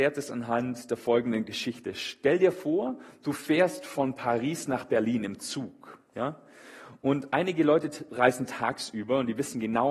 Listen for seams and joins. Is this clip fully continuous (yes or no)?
yes